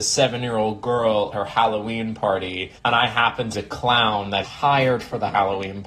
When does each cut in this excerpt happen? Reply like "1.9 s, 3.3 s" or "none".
1.3 s, 2.8 s, 3.5 s, 4.4 s